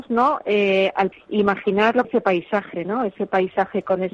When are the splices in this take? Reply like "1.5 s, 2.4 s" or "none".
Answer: 1.1 s, 2.0 s